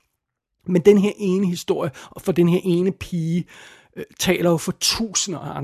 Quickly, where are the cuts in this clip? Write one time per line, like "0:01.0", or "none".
none

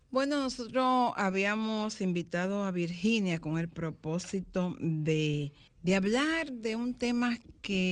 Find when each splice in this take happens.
0:05.7

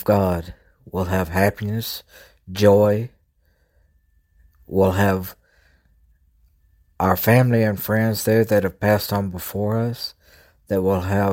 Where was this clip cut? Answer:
none

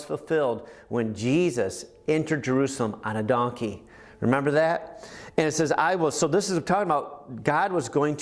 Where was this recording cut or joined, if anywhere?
none

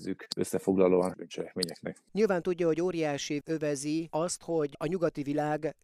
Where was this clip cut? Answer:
0:01.1
0:03.4

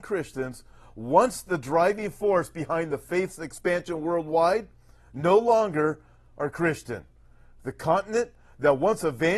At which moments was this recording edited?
none

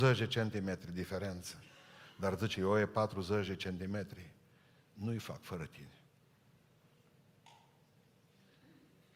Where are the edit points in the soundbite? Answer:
0:02.5

